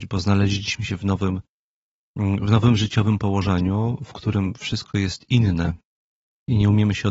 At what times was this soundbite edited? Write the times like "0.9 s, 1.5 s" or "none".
none